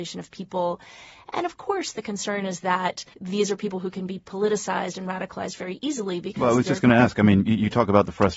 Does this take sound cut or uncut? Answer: cut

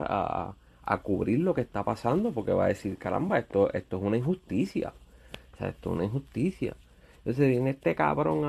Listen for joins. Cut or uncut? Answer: uncut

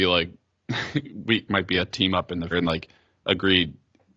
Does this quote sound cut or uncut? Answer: cut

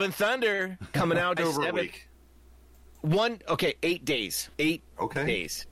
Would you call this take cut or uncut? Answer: cut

